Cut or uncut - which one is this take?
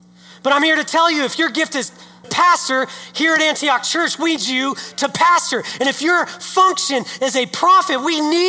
cut